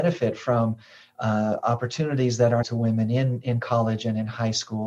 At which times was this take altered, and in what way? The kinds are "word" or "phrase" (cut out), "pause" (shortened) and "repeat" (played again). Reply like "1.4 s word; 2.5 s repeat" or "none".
2.6 s phrase